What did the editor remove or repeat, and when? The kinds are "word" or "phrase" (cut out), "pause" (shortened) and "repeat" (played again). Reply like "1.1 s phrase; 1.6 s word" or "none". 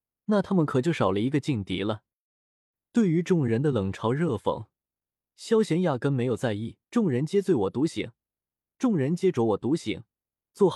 6.8 s pause